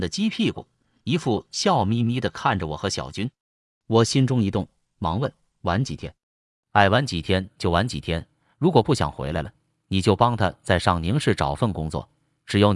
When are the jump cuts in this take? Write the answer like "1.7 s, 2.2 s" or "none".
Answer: none